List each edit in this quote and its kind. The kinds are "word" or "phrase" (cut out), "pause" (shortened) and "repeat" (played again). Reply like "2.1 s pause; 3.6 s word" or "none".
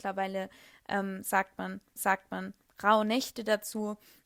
2.0 s repeat